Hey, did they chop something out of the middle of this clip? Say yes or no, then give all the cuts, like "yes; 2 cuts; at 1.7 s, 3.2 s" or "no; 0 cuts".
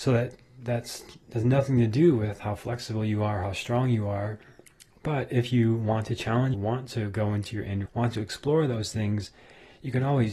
yes; 2 cuts; at 6.5 s, 7.9 s